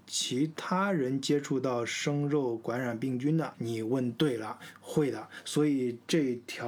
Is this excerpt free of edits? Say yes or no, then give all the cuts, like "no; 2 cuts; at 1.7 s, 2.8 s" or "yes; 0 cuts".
no; 1 cut; at 3.5 s